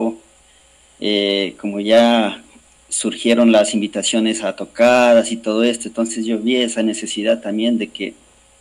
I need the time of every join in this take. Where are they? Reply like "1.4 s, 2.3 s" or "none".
none